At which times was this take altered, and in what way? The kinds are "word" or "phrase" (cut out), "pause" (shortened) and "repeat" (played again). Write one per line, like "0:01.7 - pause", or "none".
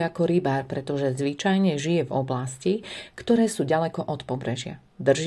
none